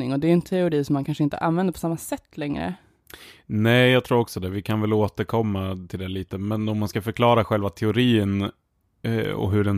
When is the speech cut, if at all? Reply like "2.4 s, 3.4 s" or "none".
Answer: none